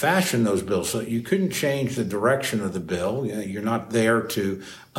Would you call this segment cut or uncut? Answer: uncut